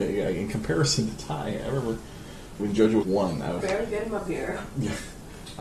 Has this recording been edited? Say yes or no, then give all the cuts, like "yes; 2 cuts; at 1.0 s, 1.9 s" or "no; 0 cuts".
yes; 3 cuts; at 2.6 s, 3.0 s, 3.6 s